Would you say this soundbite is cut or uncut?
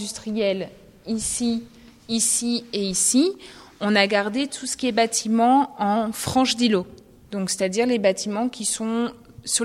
uncut